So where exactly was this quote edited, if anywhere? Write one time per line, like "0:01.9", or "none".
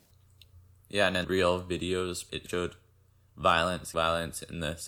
0:01.2
0:02.3
0:03.9